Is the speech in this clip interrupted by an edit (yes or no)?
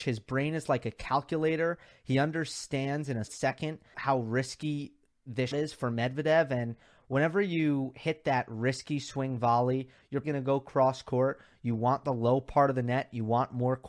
yes